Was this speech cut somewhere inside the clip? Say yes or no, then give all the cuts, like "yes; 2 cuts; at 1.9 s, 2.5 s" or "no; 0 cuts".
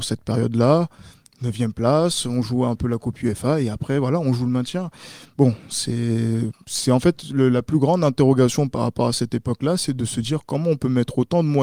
no; 0 cuts